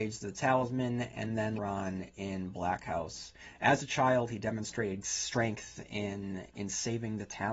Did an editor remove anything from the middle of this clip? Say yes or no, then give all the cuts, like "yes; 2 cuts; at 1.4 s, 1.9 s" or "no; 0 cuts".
yes; 2 cuts; at 1.6 s, 5.0 s